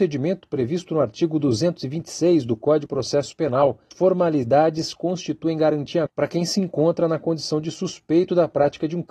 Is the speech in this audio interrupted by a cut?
yes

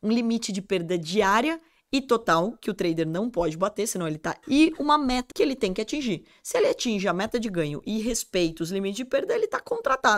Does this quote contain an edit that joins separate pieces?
yes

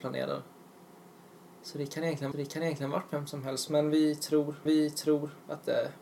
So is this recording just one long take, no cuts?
no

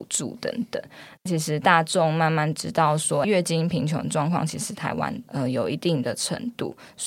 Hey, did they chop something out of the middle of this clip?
yes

